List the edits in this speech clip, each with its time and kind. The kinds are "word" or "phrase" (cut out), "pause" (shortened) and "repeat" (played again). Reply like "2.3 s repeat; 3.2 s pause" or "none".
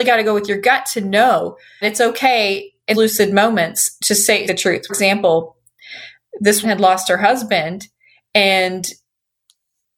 1.8 s word; 2.9 s word; 4.0 s word; 4.5 s word; 4.9 s word; 6.6 s word